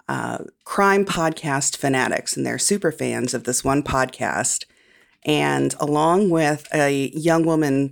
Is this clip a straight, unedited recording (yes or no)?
yes